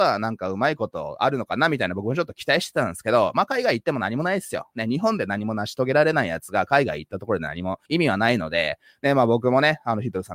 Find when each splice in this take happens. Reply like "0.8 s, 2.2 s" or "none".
7.8 s

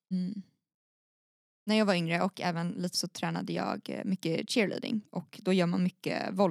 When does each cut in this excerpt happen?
2.9 s

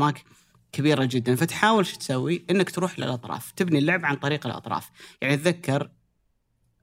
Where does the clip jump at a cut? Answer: none

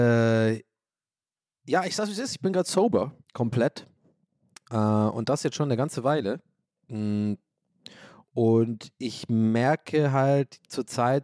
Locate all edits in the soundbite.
3.2 s, 6.6 s

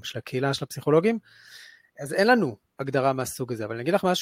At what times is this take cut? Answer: none

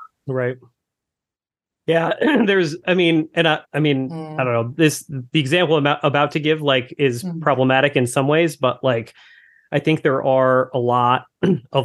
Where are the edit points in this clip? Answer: 3.6 s

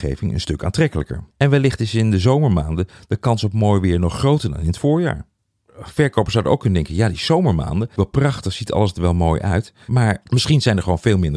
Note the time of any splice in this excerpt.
1.3 s, 8.0 s

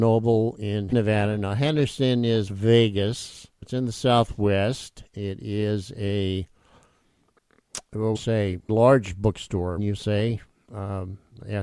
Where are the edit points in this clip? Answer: 0.9 s, 2.5 s, 3.6 s, 8.1 s, 8.7 s, 9.8 s

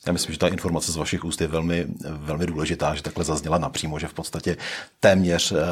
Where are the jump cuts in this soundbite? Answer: none

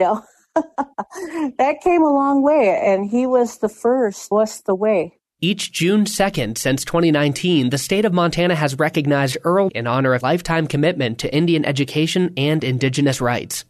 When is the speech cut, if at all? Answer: 4.3 s, 9.7 s, 10.2 s

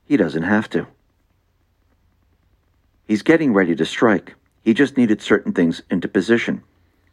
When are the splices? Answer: none

